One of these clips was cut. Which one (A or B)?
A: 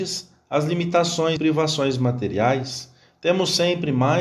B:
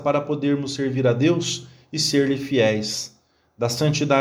A